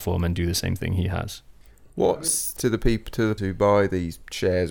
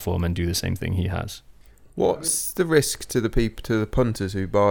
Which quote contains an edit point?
first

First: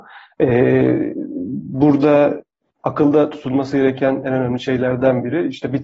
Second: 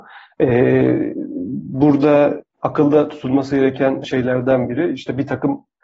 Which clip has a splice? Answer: second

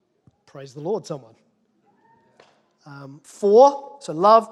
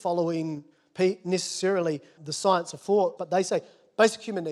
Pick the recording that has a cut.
second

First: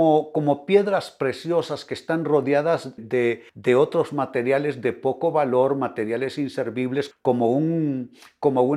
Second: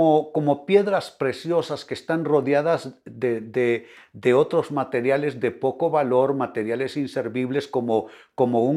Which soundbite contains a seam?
first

